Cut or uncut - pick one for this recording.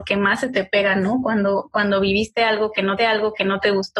cut